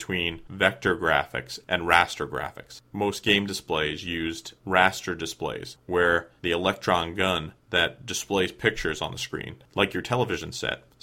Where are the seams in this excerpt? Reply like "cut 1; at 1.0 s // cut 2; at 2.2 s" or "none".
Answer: cut 1; at 4.6 s